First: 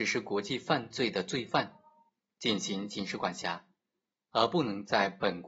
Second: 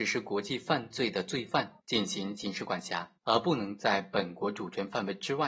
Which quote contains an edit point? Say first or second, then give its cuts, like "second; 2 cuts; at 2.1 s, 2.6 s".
second; 2 cuts; at 1.8 s, 3.2 s